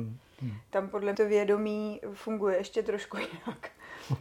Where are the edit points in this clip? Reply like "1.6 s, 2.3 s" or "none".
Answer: 1.1 s